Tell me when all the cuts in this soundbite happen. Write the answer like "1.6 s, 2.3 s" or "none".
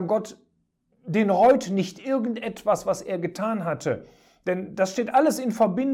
none